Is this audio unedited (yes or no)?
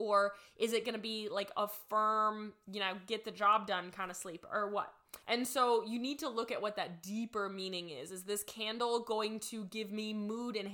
no